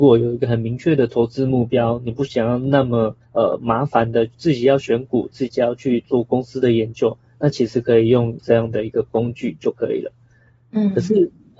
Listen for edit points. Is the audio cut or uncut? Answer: cut